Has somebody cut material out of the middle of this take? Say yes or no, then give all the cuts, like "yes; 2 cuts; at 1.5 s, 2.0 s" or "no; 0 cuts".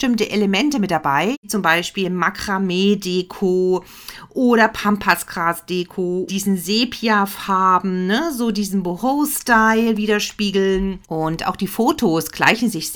yes; 2 cuts; at 6.3 s, 11.0 s